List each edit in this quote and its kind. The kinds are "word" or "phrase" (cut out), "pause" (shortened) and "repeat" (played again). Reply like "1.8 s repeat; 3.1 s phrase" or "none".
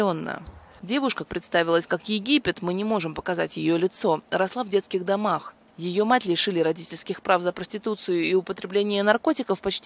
1.3 s word